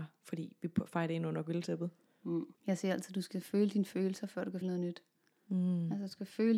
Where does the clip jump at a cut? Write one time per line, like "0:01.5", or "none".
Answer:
0:02.5
0:04.6